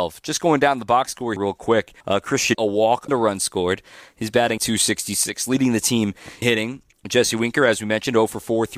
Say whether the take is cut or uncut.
cut